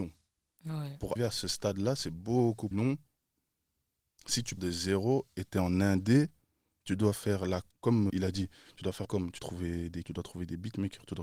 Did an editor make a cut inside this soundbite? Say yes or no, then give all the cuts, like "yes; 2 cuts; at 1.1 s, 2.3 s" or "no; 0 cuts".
yes; 8 cuts; at 1.2 s, 2.7 s, 4.6 s, 7.7 s, 8.1 s, 9.0 s, 9.4 s, 10.0 s